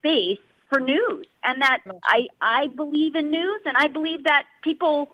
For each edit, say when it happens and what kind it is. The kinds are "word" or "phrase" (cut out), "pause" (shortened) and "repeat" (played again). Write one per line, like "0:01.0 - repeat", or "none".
0:01.9 - word